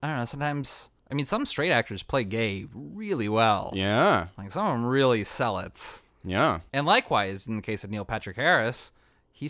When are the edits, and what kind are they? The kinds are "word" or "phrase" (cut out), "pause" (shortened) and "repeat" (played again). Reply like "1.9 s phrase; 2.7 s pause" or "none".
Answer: 1.0 s pause